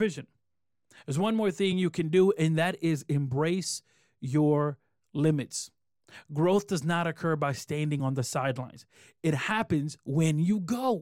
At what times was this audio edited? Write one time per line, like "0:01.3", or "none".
none